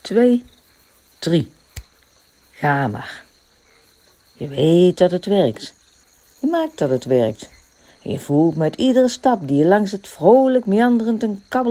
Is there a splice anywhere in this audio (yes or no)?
no